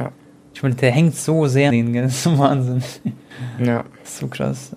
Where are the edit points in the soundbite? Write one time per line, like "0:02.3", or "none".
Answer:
0:01.7